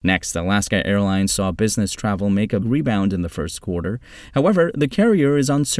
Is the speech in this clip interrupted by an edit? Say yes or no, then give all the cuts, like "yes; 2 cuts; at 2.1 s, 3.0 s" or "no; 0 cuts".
yes; 1 cut; at 2.6 s